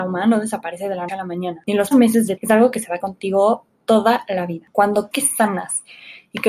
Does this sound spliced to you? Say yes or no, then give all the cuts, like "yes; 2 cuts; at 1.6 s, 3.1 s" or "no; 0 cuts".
yes; 5 cuts; at 1.1 s, 1.9 s, 2.4 s, 3.0 s, 5.1 s